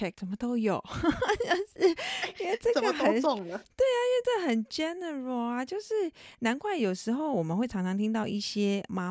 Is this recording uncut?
yes; 0 cuts

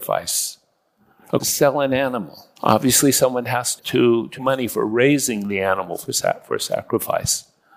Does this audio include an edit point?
yes; 4 cuts; at 1.4 s, 2.6 s, 3.8 s, 4.3 s

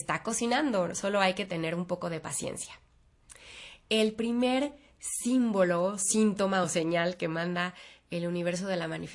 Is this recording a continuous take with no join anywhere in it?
yes; 0 cuts

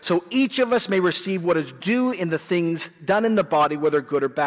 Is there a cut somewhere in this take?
no; 0 cuts

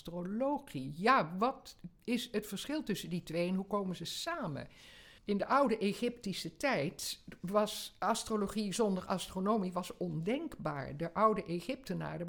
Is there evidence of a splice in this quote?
yes; 1 cut; at 5.2 s

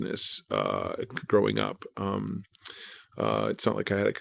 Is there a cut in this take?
no; 0 cuts

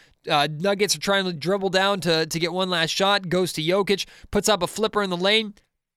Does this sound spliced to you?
no; 0 cuts

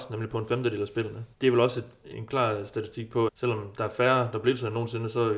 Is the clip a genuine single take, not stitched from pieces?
no; 3 cuts; at 1.3 s, 2.1 s, 3.3 s

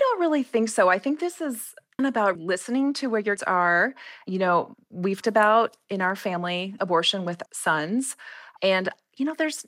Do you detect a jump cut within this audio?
yes; 6 cuts; at 2.0 s, 2.4 s, 3.4 s, 5.2 s, 6.8 s, 7.5 s

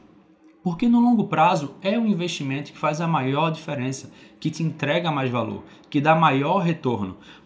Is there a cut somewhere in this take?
no; 0 cuts

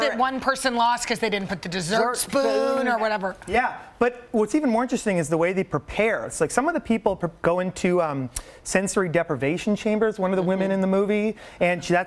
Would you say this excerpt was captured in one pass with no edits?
yes; 0 cuts

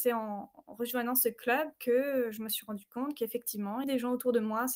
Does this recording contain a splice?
yes; 1 cut; at 3.8 s

